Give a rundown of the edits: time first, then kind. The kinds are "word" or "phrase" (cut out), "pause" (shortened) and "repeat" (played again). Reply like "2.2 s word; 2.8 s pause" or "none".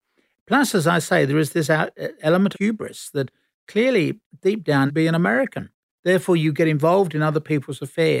2.5 s word; 4.9 s phrase; 5.9 s pause